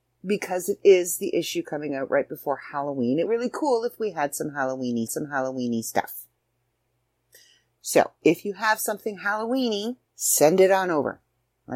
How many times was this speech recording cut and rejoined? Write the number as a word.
three